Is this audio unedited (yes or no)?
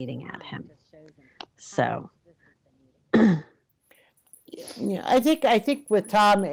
yes